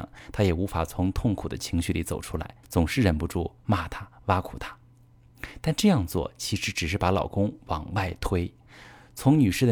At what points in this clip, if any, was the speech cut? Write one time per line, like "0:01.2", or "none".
0:02.6
0:08.7